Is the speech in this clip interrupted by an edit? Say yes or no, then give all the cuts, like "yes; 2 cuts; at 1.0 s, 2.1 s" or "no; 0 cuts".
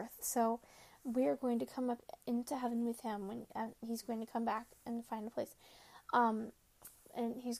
no; 0 cuts